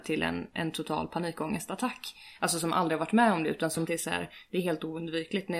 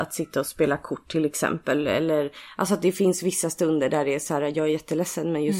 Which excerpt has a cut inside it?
first; 1 cut; at 3.9 s

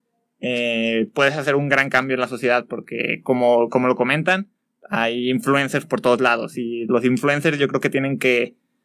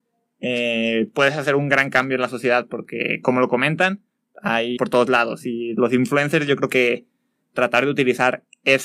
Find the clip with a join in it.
second; 3 cuts; at 3.2 s, 4.8 s, 6.7 s

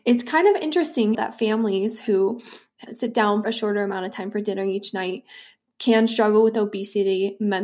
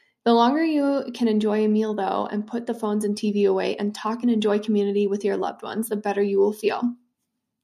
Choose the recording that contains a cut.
first; 3 cuts; at 1.1 s, 2.9 s, 3.4 s

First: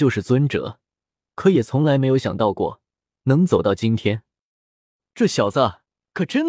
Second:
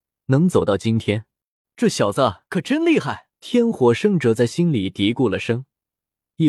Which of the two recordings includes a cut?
second; 3 cuts; at 1.6 s, 2.5 s, 3.3 s

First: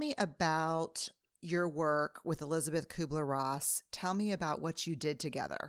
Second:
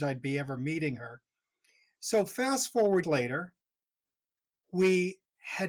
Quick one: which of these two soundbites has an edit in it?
second; 1 cut; at 3.0 s

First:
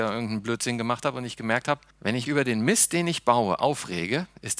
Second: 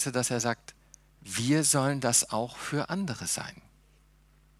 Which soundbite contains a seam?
first; 2 cuts; at 1.9 s, 2.3 s

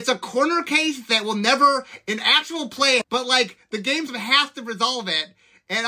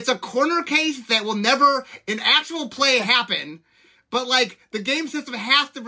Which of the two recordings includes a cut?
first; 2 cuts; at 3.0 s, 4.1 s

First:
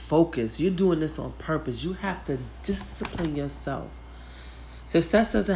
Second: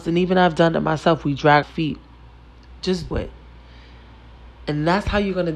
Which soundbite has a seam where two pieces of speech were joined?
second; 2 cuts; at 1.6 s, 3.1 s

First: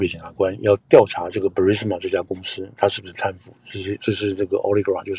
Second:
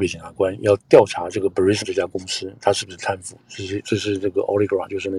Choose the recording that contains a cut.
second; 1 cut; at 1.8 s

